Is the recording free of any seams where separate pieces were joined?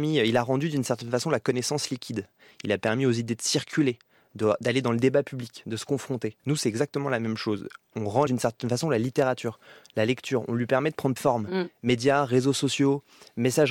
no; 3 cuts; at 6.4 s, 8.3 s, 11.2 s

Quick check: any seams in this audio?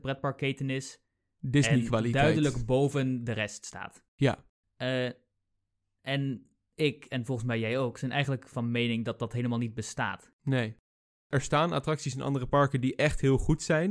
no; 0 cuts

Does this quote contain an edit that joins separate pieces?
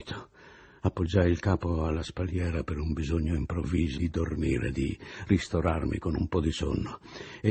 yes; 1 cut; at 4.0 s

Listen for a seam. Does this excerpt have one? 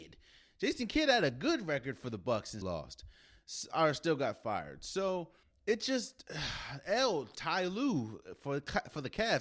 yes; 3 cuts; at 2.6 s, 5.4 s, 7.3 s

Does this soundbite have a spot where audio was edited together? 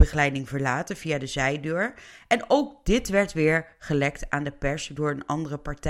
no; 0 cuts

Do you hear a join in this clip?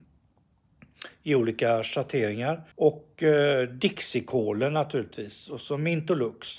yes; 1 cut; at 2.7 s

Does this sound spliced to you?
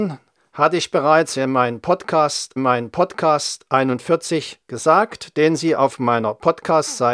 yes; 1 cut; at 2.6 s

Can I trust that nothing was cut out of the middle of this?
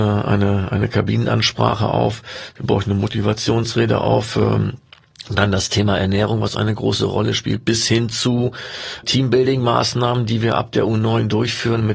no; 1 cut; at 9.0 s

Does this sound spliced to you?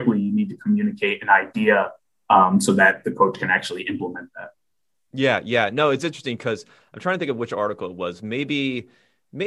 no; 0 cuts

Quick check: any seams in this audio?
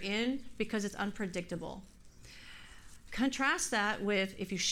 no; 0 cuts

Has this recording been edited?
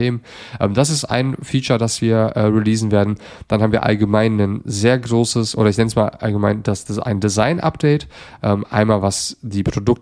no; 0 cuts

